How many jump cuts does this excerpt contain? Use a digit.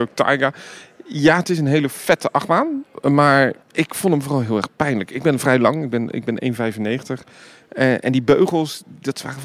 1